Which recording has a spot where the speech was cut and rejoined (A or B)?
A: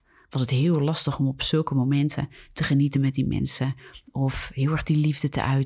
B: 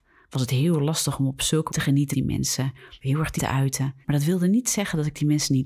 B